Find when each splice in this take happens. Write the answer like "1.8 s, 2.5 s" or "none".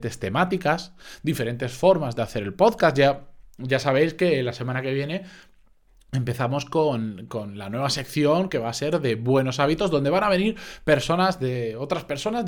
none

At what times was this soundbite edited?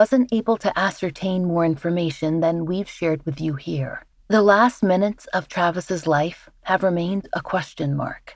none

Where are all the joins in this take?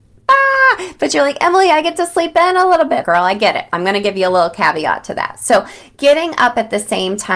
3.0 s

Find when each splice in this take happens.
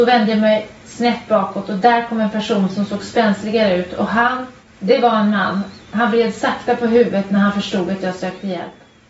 4.6 s

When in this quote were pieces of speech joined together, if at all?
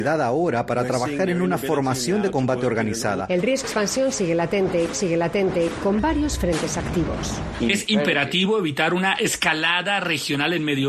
3.6 s, 4.9 s

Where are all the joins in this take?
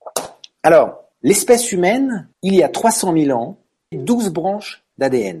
1.1 s, 2.3 s, 3.9 s

